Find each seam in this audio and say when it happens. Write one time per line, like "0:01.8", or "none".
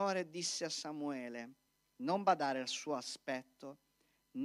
none